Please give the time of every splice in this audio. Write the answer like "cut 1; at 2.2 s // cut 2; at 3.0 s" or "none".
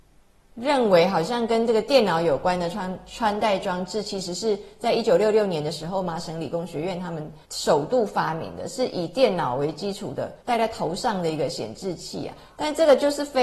cut 1; at 7.4 s // cut 2; at 10.4 s